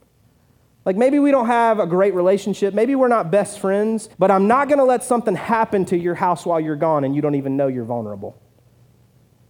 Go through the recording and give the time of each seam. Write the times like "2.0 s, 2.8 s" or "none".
4.1 s